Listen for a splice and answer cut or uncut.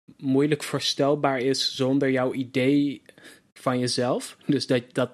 uncut